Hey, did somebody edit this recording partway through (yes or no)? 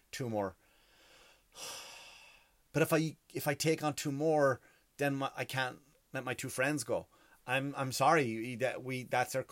no